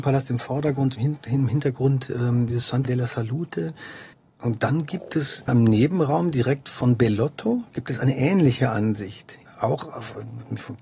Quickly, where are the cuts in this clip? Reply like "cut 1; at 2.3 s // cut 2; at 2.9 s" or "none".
cut 1; at 2.8 s // cut 2; at 4.3 s // cut 3; at 5.5 s // cut 4; at 9.5 s